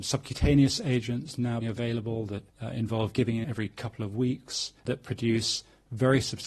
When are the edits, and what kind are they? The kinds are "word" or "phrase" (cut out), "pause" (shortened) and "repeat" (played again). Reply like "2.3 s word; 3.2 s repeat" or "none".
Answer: 1.6 s word; 2.5 s pause; 3.4 s word; 4.8 s pause